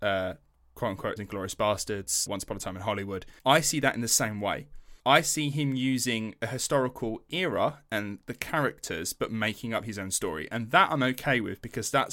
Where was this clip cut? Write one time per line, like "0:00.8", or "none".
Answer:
0:01.2
0:02.3
0:03.4
0:05.0